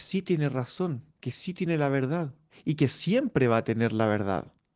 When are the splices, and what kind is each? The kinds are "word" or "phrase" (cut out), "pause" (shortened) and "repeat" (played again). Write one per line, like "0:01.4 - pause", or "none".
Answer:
0:01.1 - pause
0:02.5 - pause